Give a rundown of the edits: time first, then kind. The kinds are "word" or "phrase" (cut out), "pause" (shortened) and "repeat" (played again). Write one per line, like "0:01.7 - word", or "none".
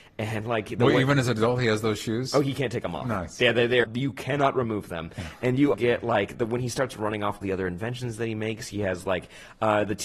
0:03.8 - word
0:05.7 - word
0:07.4 - word